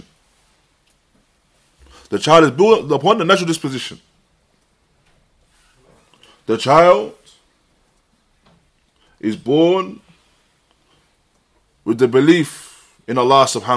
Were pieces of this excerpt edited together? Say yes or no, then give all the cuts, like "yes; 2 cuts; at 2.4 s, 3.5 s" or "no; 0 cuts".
no; 0 cuts